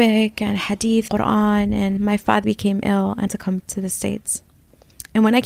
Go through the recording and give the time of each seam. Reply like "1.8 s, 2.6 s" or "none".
1.1 s, 2.0 s, 2.4 s, 3.3 s, 3.6 s